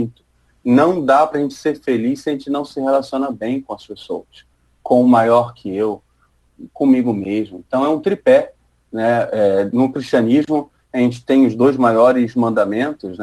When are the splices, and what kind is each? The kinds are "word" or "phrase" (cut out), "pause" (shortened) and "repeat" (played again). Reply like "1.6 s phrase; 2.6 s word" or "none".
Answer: none